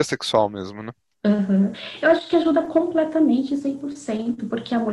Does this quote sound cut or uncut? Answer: uncut